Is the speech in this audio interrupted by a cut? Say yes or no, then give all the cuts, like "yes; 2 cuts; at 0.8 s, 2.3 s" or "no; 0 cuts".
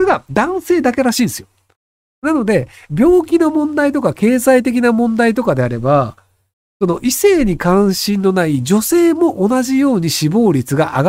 no; 0 cuts